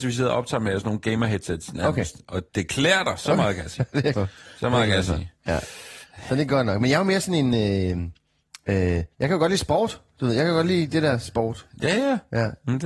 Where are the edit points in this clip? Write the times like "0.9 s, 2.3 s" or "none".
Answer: 2.5 s, 4.1 s, 9.1 s